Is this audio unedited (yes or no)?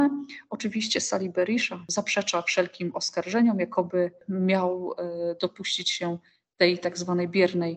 yes